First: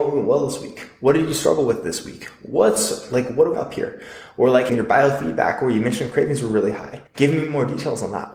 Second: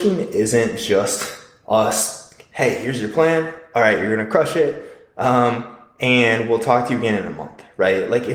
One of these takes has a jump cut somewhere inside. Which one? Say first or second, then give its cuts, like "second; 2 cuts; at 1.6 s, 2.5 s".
first; 3 cuts; at 3.5 s, 4.7 s, 7.1 s